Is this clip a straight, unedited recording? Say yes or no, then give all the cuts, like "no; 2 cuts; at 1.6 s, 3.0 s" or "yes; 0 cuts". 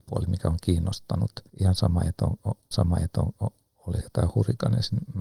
no; 3 cuts; at 1.5 s, 2.7 s, 4.0 s